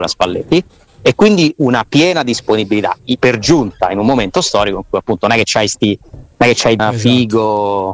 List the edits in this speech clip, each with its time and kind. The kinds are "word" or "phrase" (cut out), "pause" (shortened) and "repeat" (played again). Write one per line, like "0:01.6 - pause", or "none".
0:06.3 - pause
0:06.8 - word